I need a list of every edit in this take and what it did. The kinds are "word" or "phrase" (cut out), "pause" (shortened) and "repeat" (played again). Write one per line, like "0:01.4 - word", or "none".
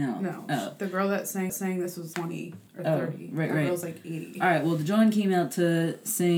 0:01.5 - repeat
0:02.1 - word
0:02.7 - pause